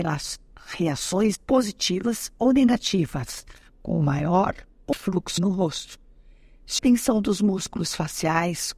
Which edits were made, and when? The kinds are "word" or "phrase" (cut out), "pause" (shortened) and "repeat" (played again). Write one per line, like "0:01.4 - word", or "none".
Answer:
0:01.4 - word
0:04.9 - word
0:05.4 - word
0:06.8 - word